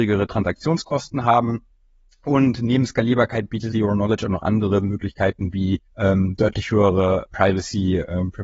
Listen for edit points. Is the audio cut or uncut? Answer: cut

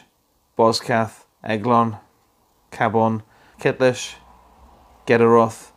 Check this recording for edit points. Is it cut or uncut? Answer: cut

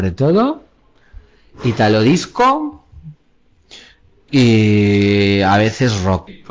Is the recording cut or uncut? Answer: uncut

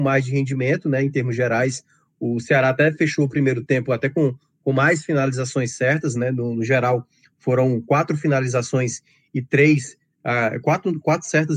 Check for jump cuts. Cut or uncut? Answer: uncut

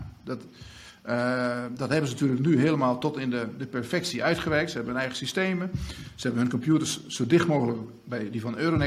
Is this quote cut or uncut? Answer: uncut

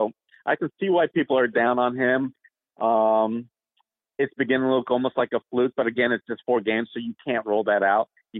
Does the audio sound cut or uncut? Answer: uncut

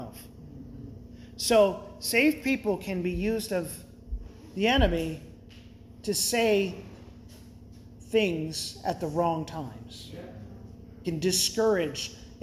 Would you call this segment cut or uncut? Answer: cut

